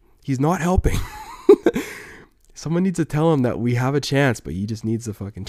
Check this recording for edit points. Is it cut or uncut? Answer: uncut